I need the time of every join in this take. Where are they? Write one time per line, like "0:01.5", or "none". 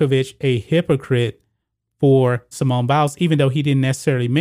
0:02.5